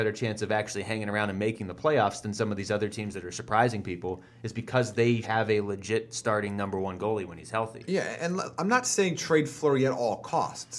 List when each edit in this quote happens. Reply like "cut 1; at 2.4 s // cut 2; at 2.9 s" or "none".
cut 1; at 5.2 s